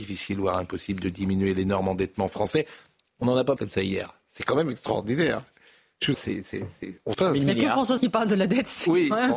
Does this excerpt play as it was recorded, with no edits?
no; 4 cuts; at 3.6 s, 6.1 s, 7.1 s, 8.0 s

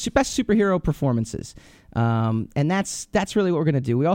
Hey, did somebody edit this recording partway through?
no; 0 cuts

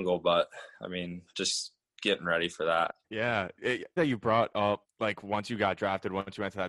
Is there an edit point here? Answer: yes; 2 cuts; at 3.0 s, 4.0 s

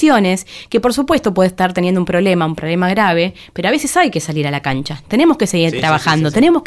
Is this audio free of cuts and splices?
yes; 0 cuts

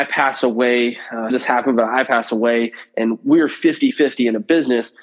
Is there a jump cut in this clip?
yes; 1 cut; at 1.3 s

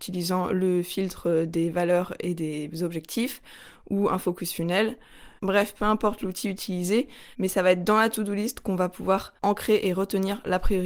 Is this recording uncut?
no; 3 cuts; at 5.4 s, 7.3 s, 9.4 s

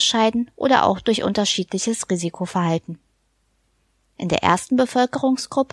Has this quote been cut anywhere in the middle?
no; 0 cuts

